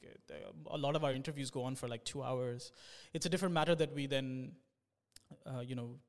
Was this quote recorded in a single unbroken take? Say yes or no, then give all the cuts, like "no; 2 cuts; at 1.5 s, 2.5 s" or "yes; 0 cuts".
yes; 0 cuts